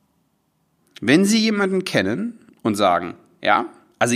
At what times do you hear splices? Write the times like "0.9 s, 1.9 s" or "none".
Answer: none

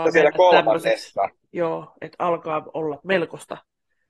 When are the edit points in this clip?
1.5 s, 3.0 s

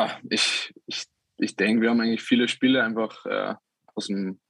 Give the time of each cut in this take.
none

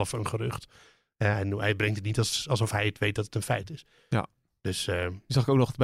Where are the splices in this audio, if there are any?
none

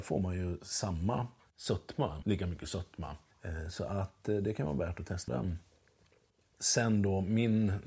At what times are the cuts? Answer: 2.2 s, 5.3 s

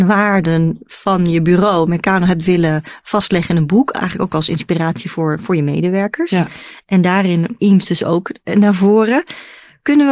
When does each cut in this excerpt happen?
7.6 s

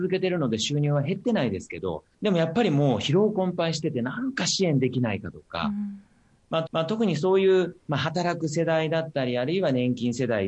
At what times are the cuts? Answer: 2.1 s, 6.7 s

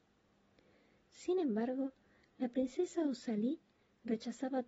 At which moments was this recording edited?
none

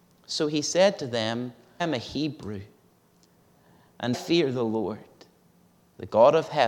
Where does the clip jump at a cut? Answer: 1.8 s, 4.1 s

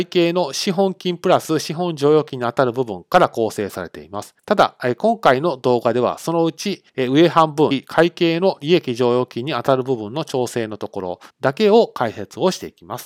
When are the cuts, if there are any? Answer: 4.4 s, 6.9 s, 11.3 s

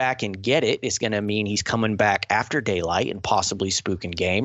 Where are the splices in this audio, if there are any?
none

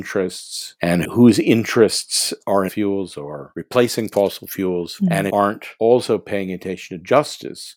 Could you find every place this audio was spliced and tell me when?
2.7 s, 5.3 s

